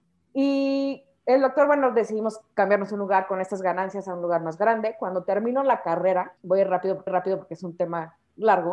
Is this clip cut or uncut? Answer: cut